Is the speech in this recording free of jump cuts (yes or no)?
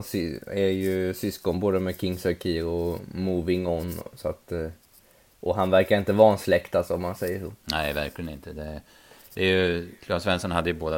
yes